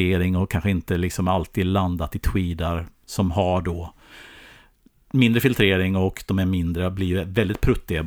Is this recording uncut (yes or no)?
yes